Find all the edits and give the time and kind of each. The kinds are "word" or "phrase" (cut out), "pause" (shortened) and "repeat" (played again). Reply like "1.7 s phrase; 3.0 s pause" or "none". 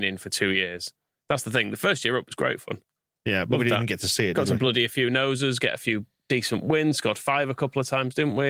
none